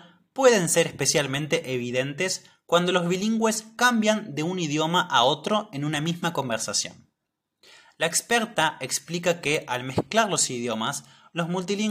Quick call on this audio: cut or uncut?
uncut